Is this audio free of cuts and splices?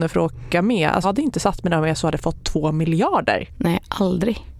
no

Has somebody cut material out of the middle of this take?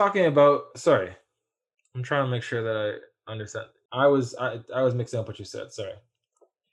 no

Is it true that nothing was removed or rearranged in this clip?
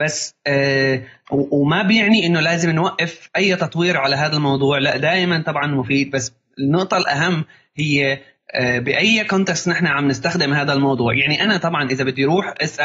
yes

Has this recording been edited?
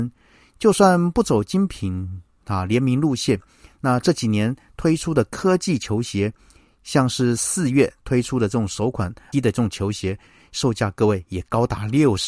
yes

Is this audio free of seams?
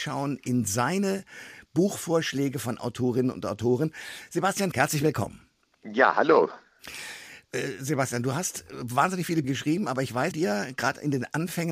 no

